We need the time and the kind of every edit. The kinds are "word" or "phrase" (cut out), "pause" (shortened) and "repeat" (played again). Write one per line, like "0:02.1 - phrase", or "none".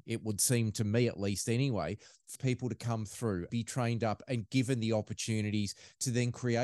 0:02.4 - word
0:03.5 - word